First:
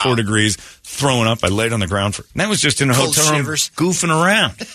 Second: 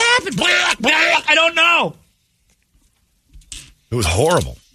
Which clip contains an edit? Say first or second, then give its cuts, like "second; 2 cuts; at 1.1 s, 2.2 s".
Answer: first; 1 cut; at 2.3 s